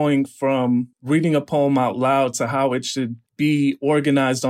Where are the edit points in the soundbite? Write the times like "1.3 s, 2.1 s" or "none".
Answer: 0.9 s, 3.3 s